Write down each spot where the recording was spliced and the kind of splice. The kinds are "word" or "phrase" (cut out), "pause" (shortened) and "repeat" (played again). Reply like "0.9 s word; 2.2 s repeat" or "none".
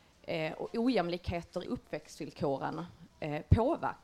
1.6 s word